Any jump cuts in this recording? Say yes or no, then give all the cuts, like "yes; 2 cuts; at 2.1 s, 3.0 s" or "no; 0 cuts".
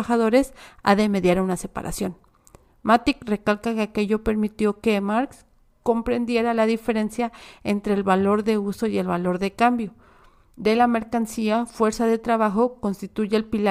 no; 0 cuts